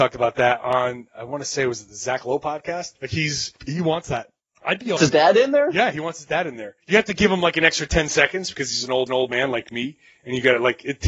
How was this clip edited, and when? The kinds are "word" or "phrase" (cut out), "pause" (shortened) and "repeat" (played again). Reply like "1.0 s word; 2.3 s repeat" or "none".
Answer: 3.0 s pause; 3.6 s pause; 4.4 s pause; 5.0 s word; 6.8 s pause; 9.1 s repeat